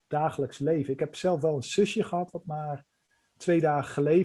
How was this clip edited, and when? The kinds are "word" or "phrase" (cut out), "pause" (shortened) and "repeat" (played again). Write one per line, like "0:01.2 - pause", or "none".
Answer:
none